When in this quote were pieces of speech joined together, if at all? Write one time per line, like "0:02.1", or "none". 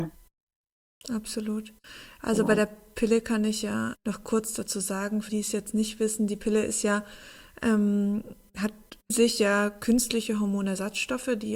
0:03.9
0:05.3
0:09.1